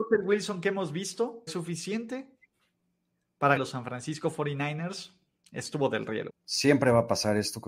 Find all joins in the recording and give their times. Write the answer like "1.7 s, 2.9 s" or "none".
1.5 s, 3.6 s, 6.3 s

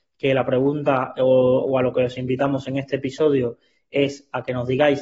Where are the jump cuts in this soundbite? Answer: none

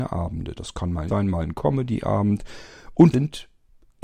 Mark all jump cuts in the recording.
1.1 s, 3.1 s

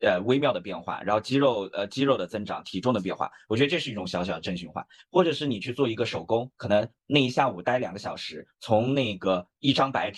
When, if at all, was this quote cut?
none

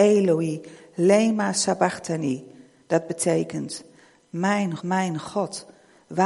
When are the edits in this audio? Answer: 4.8 s

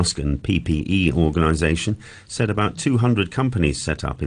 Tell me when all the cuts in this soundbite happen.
none

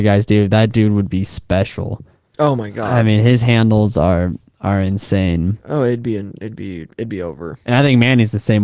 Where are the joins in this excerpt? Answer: none

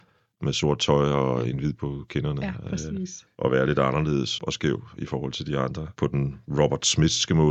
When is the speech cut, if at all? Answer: 1.8 s, 4.4 s

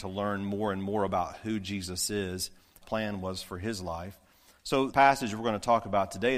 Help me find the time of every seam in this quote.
2.8 s, 4.9 s

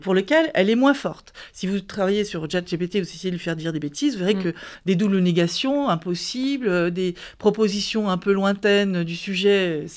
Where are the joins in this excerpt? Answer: none

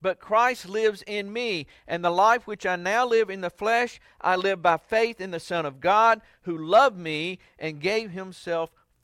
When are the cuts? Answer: none

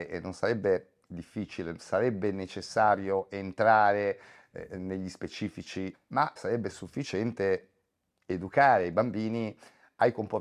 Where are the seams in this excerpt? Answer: 1.8 s, 5.9 s, 6.4 s

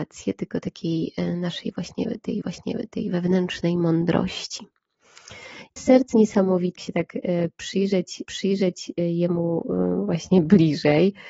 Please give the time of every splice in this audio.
2.4 s, 5.8 s, 6.1 s, 6.8 s, 8.2 s

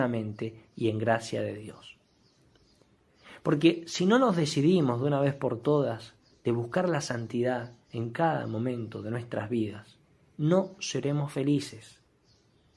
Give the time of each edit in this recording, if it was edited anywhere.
7.8 s

